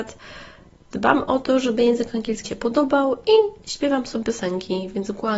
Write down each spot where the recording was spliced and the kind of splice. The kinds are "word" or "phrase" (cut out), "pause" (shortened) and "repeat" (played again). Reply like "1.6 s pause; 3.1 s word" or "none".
2.4 s word; 4.2 s phrase